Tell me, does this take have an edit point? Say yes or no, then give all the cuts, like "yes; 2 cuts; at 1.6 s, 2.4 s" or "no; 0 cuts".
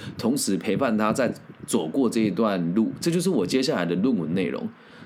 yes; 1 cut; at 1.6 s